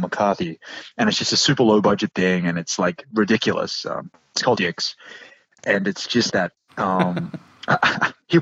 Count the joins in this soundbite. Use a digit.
2